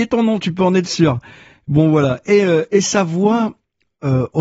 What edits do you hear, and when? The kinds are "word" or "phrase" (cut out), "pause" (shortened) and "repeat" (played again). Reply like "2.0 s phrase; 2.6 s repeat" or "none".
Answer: none